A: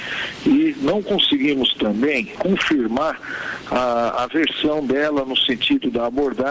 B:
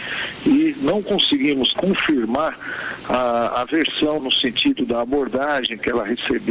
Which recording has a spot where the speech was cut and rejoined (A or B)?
B